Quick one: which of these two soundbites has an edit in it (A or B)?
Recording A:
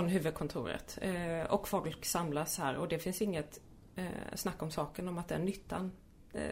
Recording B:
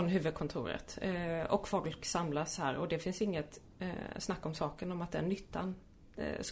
B